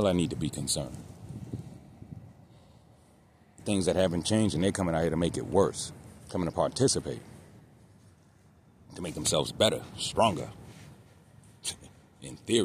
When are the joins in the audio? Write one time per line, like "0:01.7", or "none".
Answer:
0:03.6
0:06.2